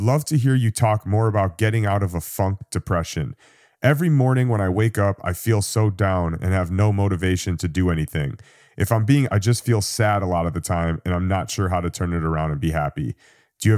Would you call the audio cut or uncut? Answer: cut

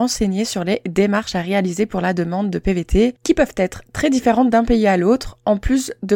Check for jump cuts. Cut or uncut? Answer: uncut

